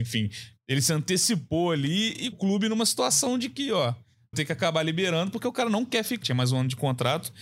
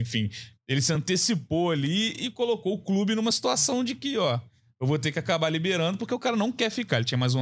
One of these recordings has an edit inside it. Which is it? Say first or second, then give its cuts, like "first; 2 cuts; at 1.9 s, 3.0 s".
first; 3 cuts; at 2.3 s, 4.3 s, 6.2 s